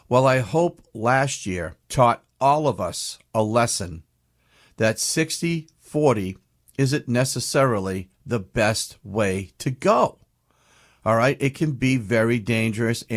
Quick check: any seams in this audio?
yes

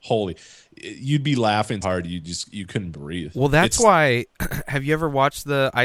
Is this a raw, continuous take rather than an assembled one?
no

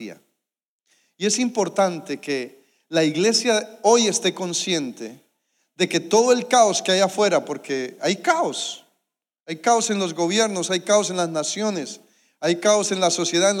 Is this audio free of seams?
yes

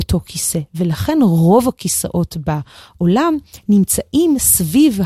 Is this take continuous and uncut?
yes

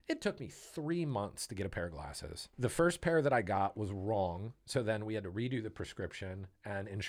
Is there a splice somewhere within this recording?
yes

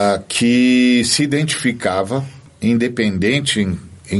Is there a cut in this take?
yes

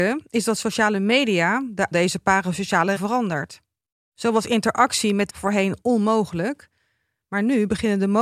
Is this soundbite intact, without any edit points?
no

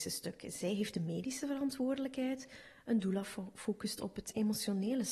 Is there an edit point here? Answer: no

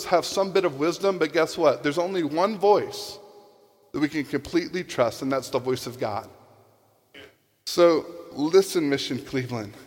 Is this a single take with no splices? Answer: yes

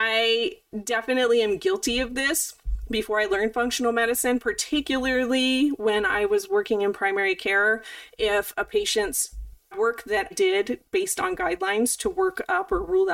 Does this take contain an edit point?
yes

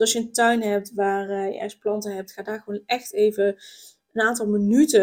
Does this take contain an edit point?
no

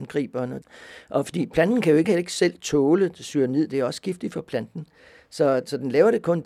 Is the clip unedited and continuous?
no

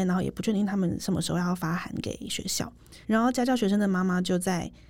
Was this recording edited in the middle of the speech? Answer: yes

